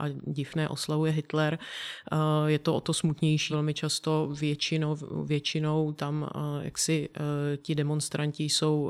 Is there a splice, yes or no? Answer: yes